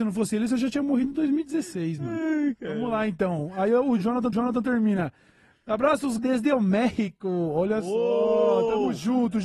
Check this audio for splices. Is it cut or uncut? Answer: cut